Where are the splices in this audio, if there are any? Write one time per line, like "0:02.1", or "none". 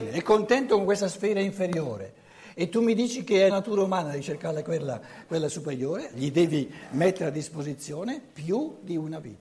0:03.5
0:06.1